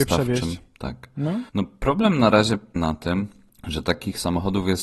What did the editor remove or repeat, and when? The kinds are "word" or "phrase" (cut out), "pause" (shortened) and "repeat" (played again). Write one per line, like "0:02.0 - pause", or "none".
0:01.5 - pause
0:02.8 - word